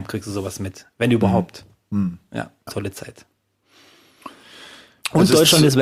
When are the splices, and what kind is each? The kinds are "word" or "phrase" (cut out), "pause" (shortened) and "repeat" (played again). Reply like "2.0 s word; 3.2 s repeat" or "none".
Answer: 2.7 s word